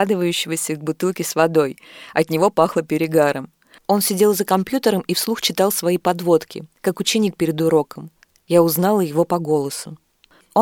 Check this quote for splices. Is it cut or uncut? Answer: uncut